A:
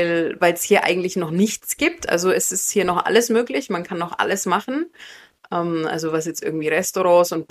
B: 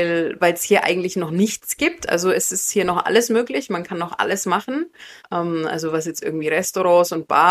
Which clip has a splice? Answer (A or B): B